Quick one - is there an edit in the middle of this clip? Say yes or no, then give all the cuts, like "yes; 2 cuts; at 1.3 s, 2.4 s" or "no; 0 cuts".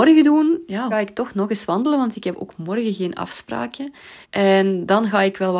yes; 2 cuts; at 0.9 s, 4.2 s